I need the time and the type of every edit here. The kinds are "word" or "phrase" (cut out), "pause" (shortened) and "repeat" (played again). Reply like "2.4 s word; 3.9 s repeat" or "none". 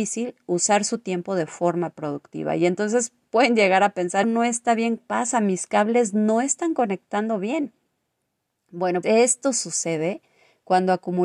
4.2 s phrase; 5.0 s phrase; 9.0 s word